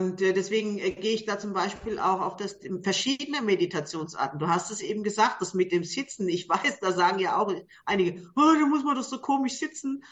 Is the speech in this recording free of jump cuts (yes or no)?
yes